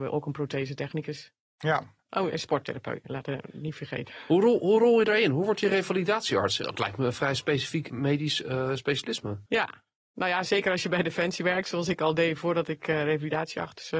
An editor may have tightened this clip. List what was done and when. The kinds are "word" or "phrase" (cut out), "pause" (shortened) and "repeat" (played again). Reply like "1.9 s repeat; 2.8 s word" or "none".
9.5 s pause